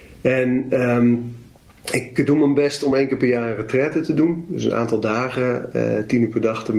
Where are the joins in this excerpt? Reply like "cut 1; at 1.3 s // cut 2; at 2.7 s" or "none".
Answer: none

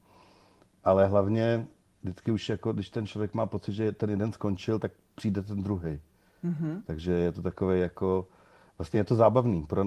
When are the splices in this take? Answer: none

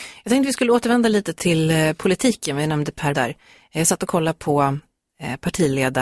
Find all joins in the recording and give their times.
cut 1; at 1.4 s // cut 2; at 3.1 s

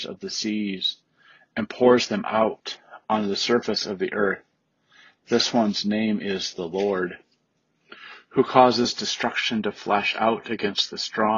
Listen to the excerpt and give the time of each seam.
none

